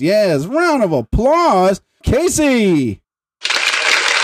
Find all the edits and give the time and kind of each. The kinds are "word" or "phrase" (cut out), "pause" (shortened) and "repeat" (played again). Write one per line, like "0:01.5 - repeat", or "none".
0:02.0 - phrase
0:03.0 - pause